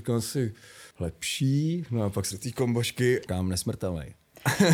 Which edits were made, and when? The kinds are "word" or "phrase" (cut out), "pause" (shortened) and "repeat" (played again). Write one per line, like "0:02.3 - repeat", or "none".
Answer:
0:00.9 - pause
0:02.3 - word
0:03.3 - word